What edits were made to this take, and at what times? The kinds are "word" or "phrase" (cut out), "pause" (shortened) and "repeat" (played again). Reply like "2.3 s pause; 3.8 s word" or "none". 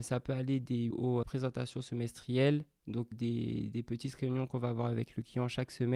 0.9 s word; 1.2 s word; 3.1 s word

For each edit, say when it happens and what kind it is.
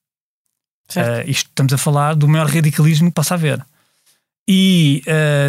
3.1 s word

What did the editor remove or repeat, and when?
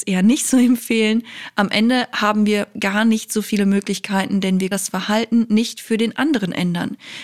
4.7 s word

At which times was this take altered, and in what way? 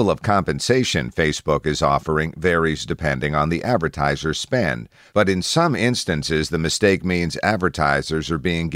none

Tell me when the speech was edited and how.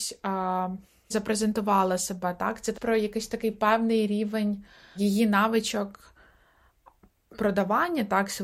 1.1 s word; 2.7 s word; 5.0 s word; 7.4 s word

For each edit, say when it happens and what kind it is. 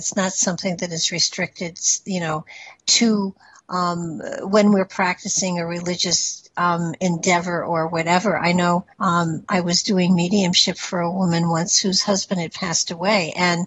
8.9 s pause

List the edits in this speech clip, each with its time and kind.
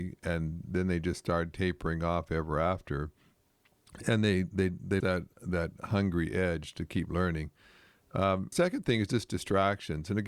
5.0 s word; 8.5 s phrase

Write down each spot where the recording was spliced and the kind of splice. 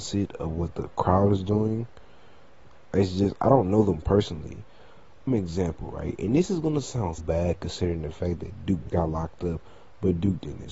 5.3 s word; 7.2 s word; 8.9 s word

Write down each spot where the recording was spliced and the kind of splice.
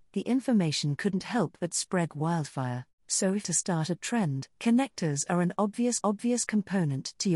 2.1 s word; 3.0 s pause; 3.4 s phrase; 4.5 s pause; 6.0 s repeat

